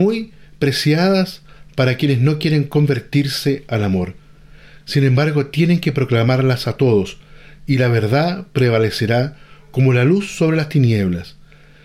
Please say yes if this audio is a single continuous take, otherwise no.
yes